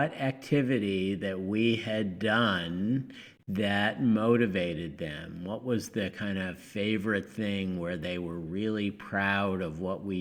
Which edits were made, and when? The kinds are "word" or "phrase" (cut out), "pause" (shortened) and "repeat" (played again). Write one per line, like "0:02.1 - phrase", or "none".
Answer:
none